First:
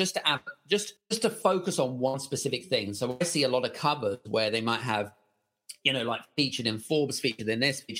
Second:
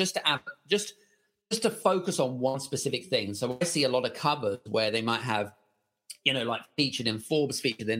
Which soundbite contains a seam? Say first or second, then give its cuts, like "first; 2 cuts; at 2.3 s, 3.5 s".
first; 1 cut; at 1.0 s